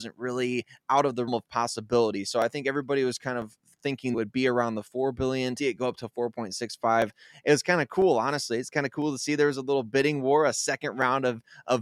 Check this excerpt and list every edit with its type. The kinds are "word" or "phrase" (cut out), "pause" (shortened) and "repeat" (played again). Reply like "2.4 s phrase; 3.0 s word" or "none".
1.3 s word; 4.1 s phrase; 5.6 s word

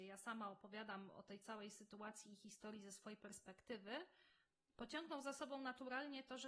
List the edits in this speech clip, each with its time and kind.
none

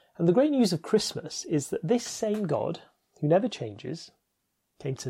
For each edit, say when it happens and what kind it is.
none

